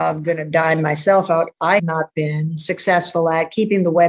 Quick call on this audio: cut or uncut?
cut